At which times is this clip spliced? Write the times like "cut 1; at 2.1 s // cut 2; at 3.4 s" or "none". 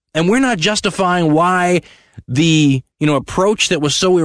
cut 1; at 2.9 s

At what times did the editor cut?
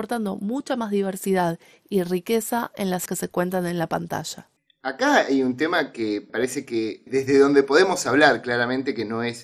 cut 1; at 3.1 s // cut 2; at 6.3 s // cut 3; at 7.1 s

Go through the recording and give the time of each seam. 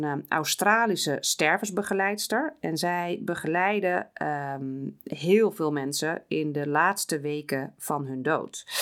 none

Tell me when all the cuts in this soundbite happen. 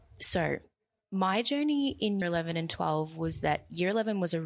cut 1; at 2.2 s

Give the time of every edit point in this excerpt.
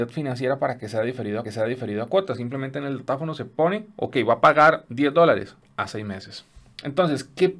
cut 1; at 1.4 s

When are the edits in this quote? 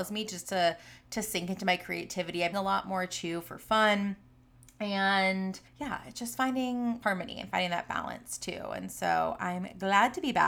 cut 1; at 2.5 s // cut 2; at 5.7 s // cut 3; at 7.0 s

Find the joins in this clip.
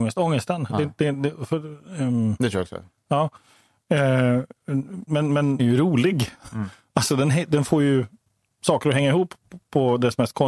cut 1; at 5.1 s // cut 2; at 5.6 s

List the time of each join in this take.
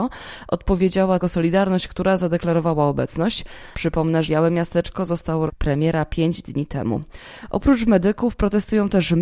cut 1; at 1.2 s // cut 2; at 4.3 s // cut 3; at 5.5 s

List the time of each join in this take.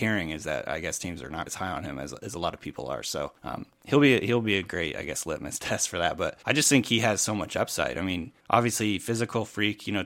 cut 1; at 1.5 s // cut 2; at 3.4 s // cut 3; at 6.4 s // cut 4; at 8.4 s

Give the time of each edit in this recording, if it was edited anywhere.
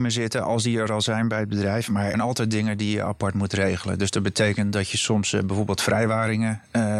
cut 1; at 2.1 s

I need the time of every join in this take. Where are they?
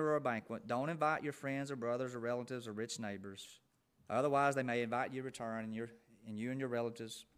cut 1; at 3.8 s

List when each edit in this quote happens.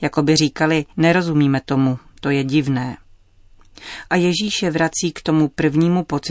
cut 1; at 0.9 s

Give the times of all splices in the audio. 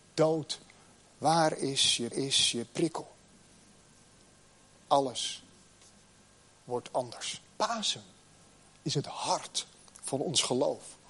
cut 1; at 2.1 s // cut 2; at 7.5 s

